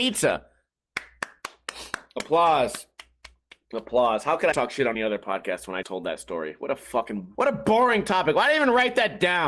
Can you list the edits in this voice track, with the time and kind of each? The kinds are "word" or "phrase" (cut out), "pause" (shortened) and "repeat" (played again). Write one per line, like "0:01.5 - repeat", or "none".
0:04.5 - word
0:04.9 - word
0:05.8 - word
0:07.3 - word